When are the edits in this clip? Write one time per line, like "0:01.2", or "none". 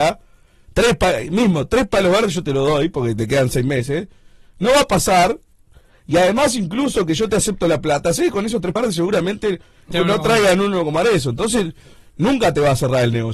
0:08.8
0:09.9